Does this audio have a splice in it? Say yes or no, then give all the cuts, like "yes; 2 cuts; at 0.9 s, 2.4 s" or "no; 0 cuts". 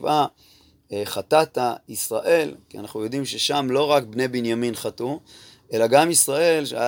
no; 0 cuts